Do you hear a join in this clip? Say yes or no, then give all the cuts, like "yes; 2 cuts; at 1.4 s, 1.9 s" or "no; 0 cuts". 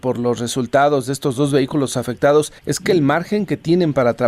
yes; 1 cut; at 2.6 s